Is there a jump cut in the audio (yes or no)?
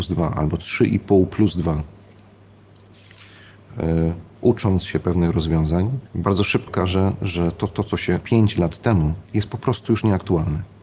yes